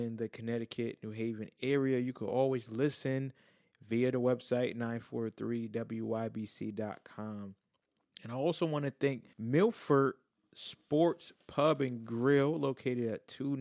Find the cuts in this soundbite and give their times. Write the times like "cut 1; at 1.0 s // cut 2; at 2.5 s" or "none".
cut 1; at 9.3 s